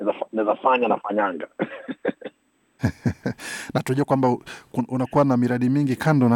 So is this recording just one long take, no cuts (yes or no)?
yes